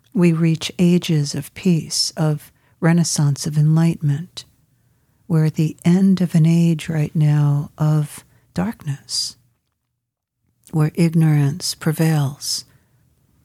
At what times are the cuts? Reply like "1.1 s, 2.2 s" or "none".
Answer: none